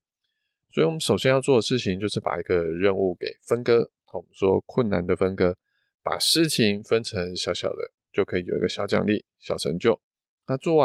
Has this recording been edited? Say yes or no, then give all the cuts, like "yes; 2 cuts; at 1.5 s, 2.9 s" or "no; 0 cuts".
no; 0 cuts